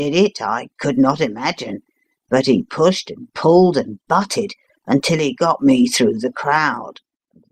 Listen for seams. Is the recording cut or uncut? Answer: uncut